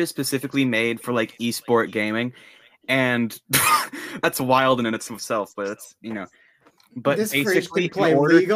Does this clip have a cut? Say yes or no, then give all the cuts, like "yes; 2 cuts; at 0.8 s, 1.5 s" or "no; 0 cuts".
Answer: no; 0 cuts